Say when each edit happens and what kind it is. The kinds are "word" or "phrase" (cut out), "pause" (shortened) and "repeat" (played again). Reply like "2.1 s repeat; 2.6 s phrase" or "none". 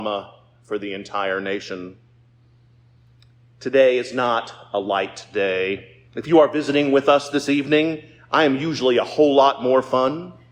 6.1 s pause